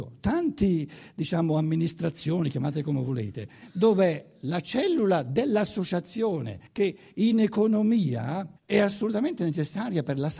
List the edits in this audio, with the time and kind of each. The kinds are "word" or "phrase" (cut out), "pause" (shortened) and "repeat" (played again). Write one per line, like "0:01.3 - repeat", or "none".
0:06.7 - pause
0:08.6 - pause